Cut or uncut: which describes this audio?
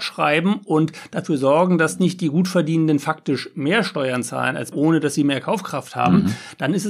cut